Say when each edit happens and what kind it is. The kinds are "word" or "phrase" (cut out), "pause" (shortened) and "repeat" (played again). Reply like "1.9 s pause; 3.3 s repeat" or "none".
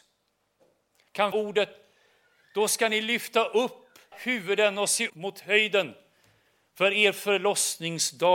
1.3 s word; 4.1 s word; 5.1 s word